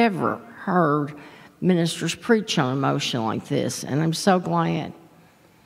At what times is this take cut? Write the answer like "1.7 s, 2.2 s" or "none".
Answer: none